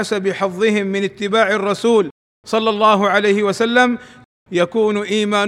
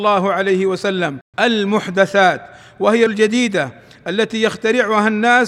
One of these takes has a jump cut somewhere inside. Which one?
second; 2 cuts; at 1.3 s, 3.1 s

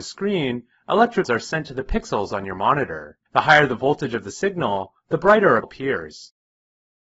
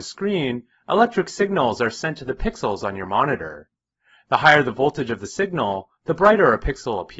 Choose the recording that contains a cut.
first; 3 cuts; at 1.2 s, 3.3 s, 5.6 s

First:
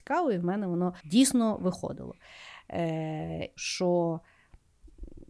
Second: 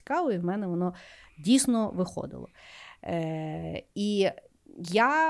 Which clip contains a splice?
first; 2 cuts; at 1.0 s, 3.6 s

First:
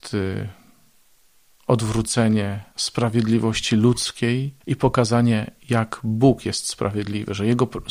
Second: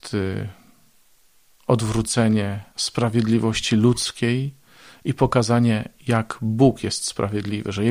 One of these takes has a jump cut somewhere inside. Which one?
first; 1 cut; at 4.6 s

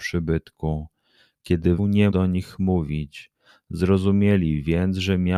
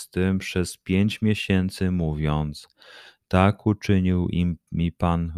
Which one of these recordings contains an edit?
first; 2 cuts; at 1.8 s, 2.1 s

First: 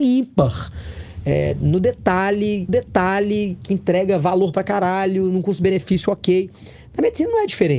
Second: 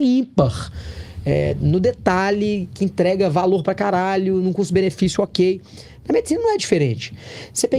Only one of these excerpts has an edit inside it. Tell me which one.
first; 1 cut; at 2.7 s

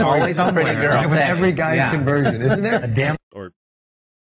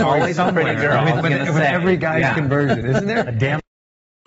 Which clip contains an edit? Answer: first; 2 cuts; at 1.0 s, 3.2 s

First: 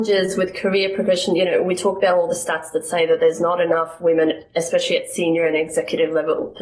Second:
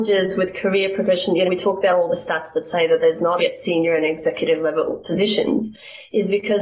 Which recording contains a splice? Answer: second; 2 cuts; at 1.4 s, 3.4 s

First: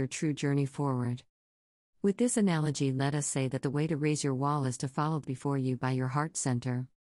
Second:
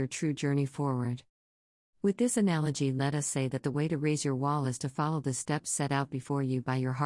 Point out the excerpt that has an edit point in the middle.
first; 1 cut; at 5.2 s

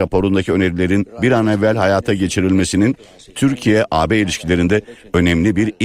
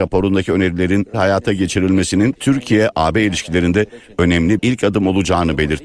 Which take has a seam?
second; 3 cuts; at 1.1 s, 2.4 s, 4.6 s

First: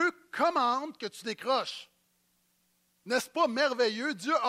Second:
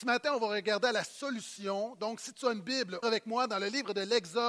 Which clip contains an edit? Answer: second; 1 cut; at 3.0 s

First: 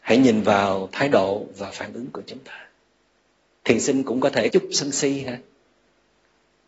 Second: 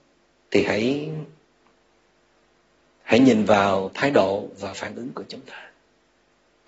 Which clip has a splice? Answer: first; 1 cut; at 4.5 s

